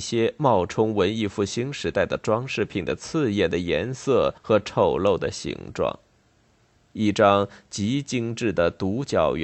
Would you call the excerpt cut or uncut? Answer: cut